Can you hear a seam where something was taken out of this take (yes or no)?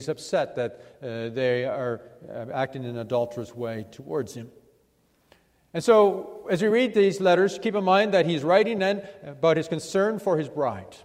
no